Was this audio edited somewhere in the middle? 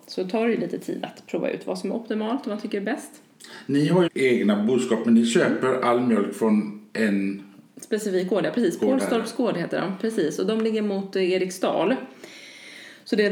yes; 1 cut; at 4.1 s

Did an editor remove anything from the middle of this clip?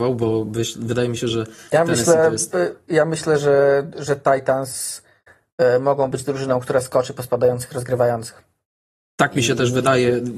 no; 0 cuts

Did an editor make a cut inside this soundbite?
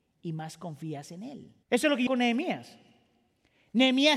yes; 2 cuts; at 1.6 s, 2.1 s

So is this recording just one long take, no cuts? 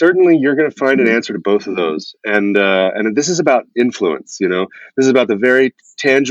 yes; 0 cuts

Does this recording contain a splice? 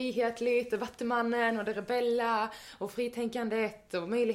no; 0 cuts

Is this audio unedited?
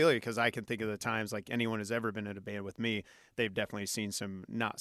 yes; 0 cuts

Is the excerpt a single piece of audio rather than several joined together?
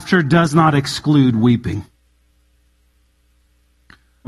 yes; 0 cuts

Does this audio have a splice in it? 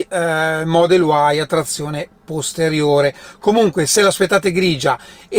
no; 0 cuts

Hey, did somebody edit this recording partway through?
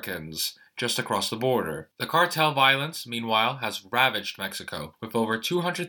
no; 0 cuts

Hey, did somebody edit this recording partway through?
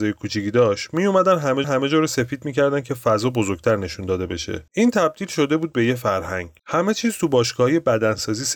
yes; 3 cuts; at 1.6 s, 4.7 s, 6.6 s

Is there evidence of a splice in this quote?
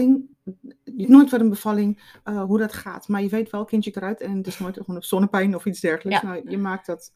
yes; 3 cuts; at 1.0 s, 2.2 s, 3.9 s

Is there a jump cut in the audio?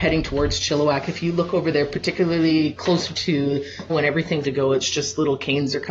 yes; 2 cuts; at 3.9 s, 4.4 s

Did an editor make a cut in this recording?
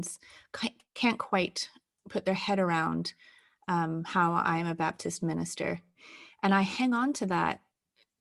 no; 0 cuts

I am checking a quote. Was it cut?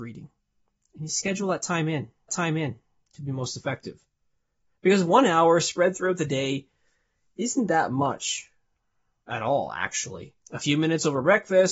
yes; 2 cuts; at 2.3 s, 10.4 s

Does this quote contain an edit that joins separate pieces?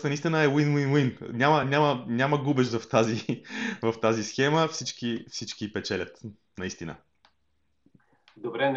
no; 0 cuts

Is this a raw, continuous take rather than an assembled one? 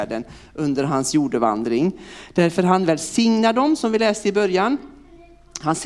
yes; 0 cuts

